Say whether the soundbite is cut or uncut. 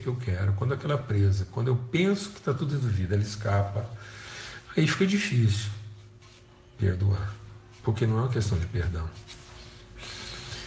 uncut